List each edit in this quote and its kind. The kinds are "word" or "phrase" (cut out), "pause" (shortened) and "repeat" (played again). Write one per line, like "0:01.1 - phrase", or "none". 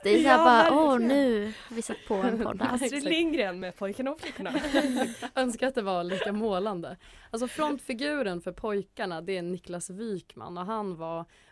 none